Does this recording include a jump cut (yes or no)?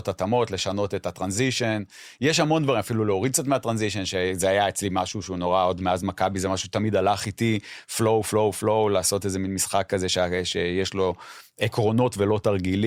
no